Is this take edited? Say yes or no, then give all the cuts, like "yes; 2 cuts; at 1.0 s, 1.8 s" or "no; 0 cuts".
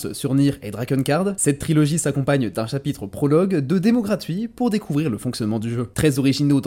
no; 0 cuts